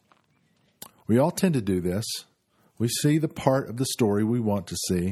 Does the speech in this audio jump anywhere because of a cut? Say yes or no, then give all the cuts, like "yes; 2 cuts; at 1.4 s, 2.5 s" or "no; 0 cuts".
no; 0 cuts